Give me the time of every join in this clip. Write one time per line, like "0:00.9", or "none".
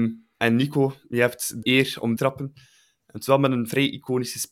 0:01.6
0:02.2